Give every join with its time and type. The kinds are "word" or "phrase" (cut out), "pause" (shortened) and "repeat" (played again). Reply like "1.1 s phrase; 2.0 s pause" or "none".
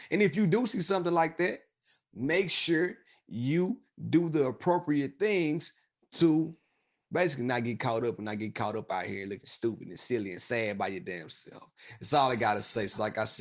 none